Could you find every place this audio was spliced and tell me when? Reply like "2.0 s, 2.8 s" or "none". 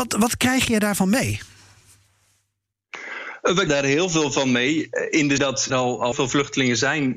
3.7 s, 5.4 s, 5.7 s, 6.1 s